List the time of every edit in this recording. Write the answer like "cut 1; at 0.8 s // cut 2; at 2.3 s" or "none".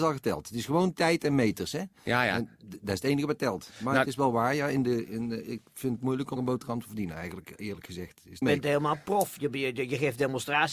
cut 1; at 6.4 s // cut 2; at 8.4 s